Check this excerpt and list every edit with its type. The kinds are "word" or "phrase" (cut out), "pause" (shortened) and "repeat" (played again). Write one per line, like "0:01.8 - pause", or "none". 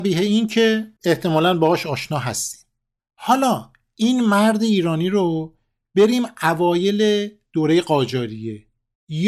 0:01.0 - pause